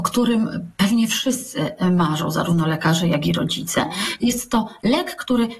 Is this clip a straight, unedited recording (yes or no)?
yes